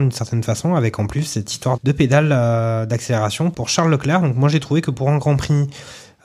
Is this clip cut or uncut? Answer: cut